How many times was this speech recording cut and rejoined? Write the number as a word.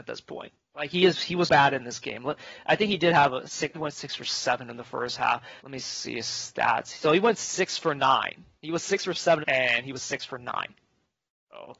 five